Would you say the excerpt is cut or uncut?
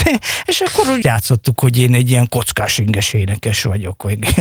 cut